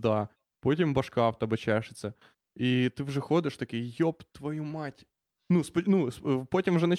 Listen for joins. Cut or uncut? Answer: uncut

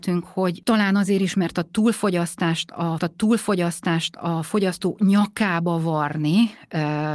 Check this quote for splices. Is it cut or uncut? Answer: cut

